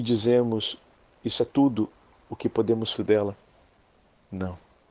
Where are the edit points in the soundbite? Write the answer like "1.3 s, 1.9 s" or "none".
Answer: 1.5 s, 2.9 s